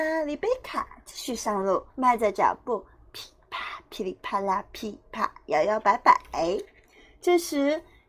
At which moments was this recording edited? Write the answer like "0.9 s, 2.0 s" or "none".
1.9 s